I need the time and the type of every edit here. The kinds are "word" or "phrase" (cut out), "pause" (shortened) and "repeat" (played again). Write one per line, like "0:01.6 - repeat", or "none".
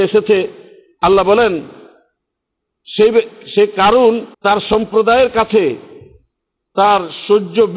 0:04.3 - pause